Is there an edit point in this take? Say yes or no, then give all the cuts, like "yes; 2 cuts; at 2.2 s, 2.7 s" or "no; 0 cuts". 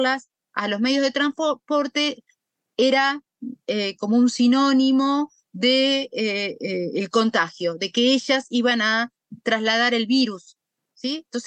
no; 0 cuts